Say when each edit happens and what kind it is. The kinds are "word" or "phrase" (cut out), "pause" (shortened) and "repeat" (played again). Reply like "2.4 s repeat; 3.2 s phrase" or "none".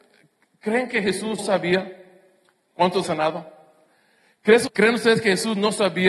1.4 s word; 3.0 s word; 4.7 s word